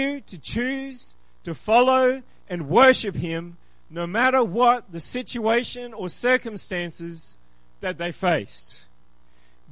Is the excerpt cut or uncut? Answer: uncut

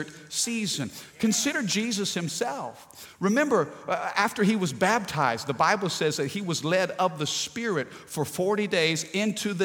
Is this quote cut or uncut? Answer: uncut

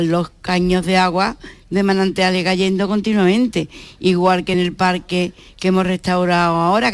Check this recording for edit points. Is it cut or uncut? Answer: uncut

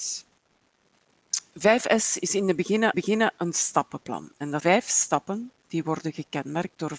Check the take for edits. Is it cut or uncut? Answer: cut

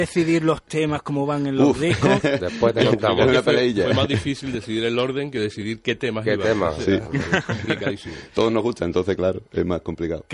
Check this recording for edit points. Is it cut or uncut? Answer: uncut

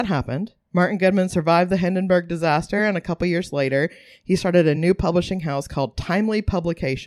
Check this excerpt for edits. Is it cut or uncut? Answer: uncut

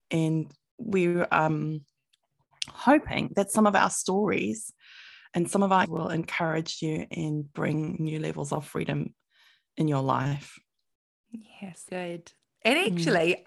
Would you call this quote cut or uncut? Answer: cut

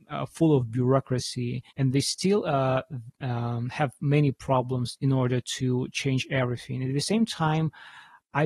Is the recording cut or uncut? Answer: cut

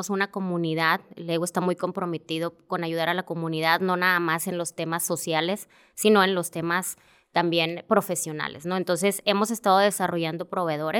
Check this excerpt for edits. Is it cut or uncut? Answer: uncut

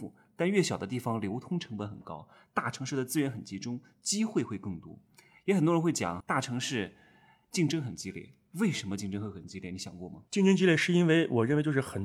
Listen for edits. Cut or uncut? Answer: cut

